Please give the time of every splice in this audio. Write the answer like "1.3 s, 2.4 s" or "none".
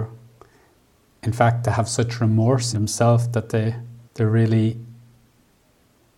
2.7 s, 4.0 s